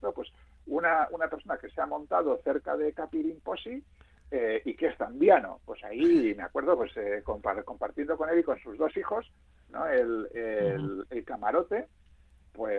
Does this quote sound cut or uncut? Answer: uncut